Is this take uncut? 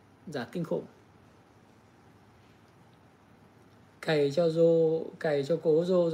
yes; 0 cuts

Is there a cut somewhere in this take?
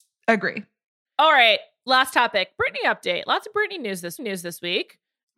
yes; 1 cut; at 4.2 s

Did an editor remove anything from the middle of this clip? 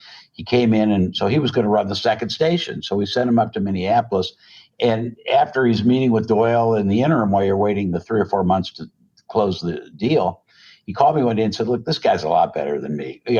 no; 0 cuts

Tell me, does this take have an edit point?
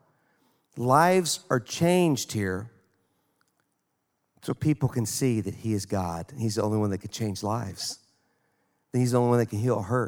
no; 0 cuts

